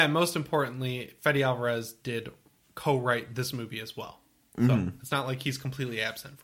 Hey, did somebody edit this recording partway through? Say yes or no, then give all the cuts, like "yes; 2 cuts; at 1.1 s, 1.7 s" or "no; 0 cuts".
no; 0 cuts